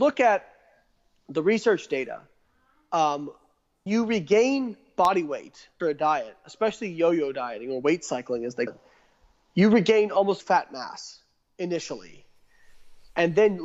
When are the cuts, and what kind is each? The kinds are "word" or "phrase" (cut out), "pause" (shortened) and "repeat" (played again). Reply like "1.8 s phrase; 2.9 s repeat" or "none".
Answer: 3.9 s word; 5.8 s word; 8.7 s word; 10.4 s word